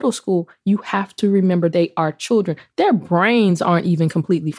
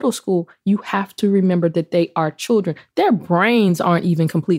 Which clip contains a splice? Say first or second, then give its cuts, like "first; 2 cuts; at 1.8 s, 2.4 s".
first; 1 cut; at 1.7 s